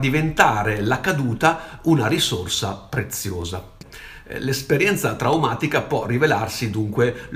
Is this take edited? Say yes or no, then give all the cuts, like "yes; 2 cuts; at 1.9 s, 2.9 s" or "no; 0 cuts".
no; 0 cuts